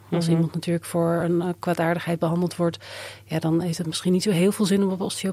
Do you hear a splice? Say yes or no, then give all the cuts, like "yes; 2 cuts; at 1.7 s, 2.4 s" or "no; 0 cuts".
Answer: no; 0 cuts